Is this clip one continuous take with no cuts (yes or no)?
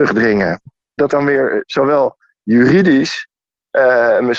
no